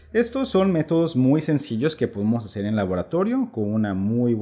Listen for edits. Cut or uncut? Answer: uncut